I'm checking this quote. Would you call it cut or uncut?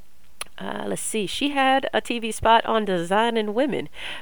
uncut